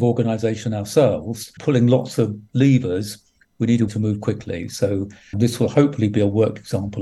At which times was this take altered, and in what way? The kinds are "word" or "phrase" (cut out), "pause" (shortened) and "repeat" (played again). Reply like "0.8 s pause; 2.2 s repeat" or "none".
1.6 s word; 3.9 s word; 5.3 s word